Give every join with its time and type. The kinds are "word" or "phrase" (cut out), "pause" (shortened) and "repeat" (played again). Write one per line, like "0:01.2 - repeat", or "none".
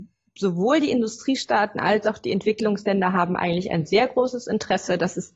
none